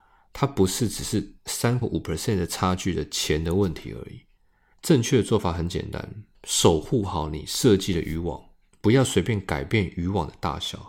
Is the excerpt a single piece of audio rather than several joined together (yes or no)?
no